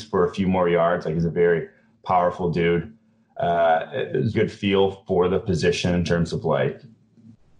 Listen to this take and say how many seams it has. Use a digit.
1